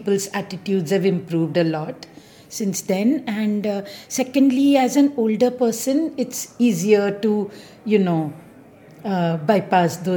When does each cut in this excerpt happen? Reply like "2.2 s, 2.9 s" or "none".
none